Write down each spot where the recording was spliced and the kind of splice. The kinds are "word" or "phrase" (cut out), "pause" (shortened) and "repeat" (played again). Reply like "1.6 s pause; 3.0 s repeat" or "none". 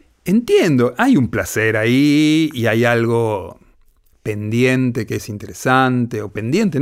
none

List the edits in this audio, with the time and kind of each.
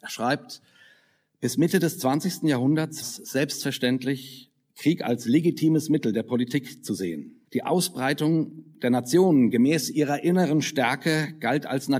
3.0 s word; 7.4 s pause

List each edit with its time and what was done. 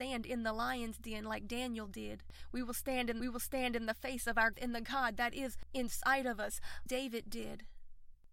3.2 s repeat; 4.5 s phrase; 6.9 s word

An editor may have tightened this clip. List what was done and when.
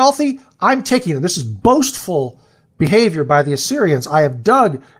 none

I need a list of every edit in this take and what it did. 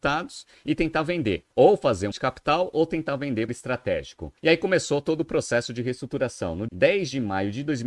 1.5 s pause; 2.1 s word; 3.5 s phrase; 4.4 s pause; 6.7 s word

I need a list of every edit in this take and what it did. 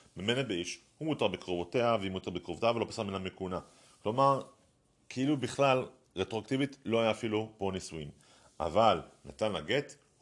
none

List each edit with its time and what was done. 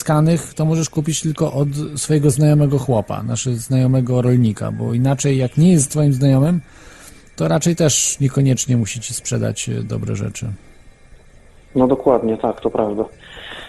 none

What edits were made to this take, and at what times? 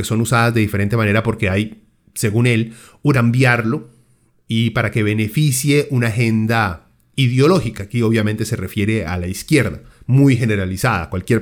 3.1 s phrase

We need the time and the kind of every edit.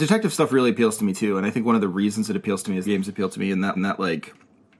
2.8 s phrase; 3.7 s repeat

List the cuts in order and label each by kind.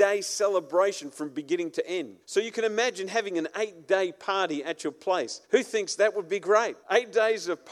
2.2 s pause; 5.4 s pause; 6.8 s pause

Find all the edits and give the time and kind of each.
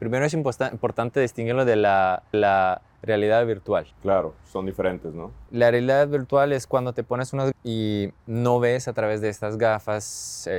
2.3 s repeat; 3.9 s pause; 5.5 s pause; 7.5 s word; 8.2 s pause

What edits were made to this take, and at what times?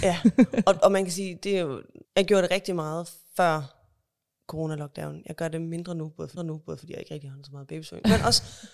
2.0 s pause; 6.4 s repeat

